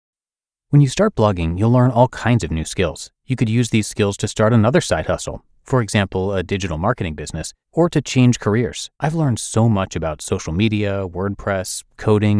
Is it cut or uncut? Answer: cut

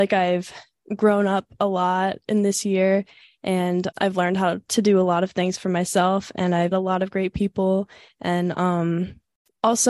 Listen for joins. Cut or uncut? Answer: cut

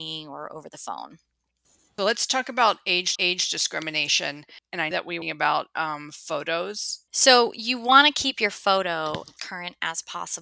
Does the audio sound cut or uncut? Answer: cut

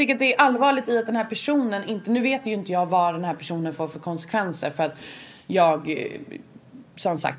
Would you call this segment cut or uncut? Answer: uncut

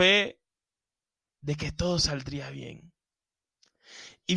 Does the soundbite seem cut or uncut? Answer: uncut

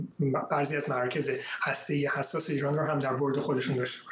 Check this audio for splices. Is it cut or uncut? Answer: uncut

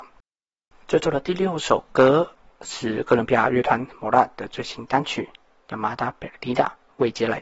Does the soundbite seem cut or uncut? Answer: uncut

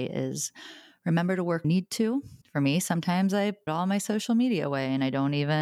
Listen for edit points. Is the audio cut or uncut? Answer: cut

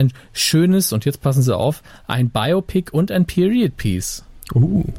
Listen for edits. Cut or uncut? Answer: uncut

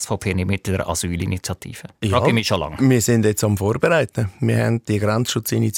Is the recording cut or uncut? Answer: cut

